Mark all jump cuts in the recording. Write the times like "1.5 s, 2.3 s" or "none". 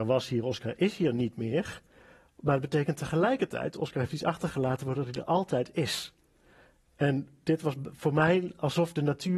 none

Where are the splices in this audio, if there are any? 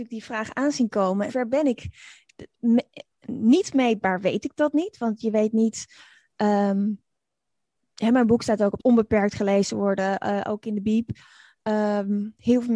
1.3 s, 8.8 s

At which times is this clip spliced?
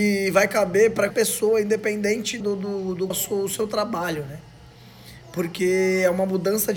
1.1 s, 2.4 s, 3.1 s

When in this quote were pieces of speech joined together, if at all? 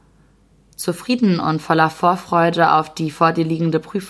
none

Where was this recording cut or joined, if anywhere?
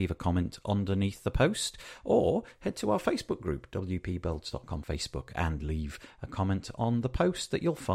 4.8 s

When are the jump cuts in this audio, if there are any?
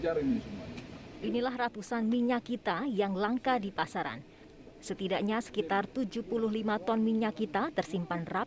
none

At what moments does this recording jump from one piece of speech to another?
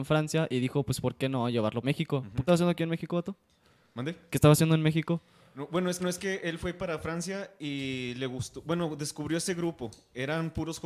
1.8 s, 2.5 s, 6.0 s

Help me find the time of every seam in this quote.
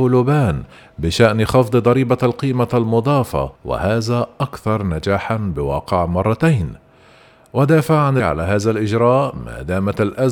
3.6 s, 8.2 s

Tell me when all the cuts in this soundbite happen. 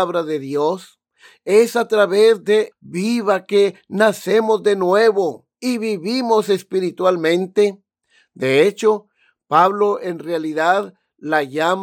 2.7 s

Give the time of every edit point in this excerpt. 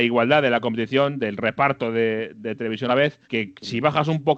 2.9 s, 3.2 s

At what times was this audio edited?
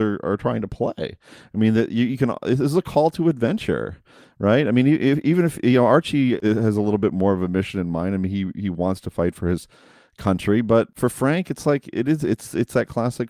none

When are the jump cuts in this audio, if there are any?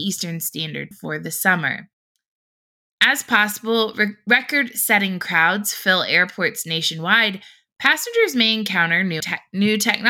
0.9 s, 9.2 s

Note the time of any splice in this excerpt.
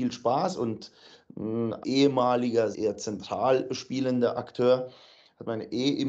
1.8 s, 2.7 s

